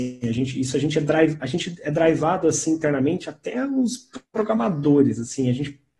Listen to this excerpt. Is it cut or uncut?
uncut